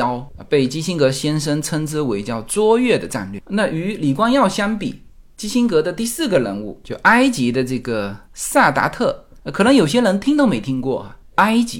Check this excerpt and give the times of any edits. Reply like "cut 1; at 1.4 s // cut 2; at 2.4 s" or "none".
none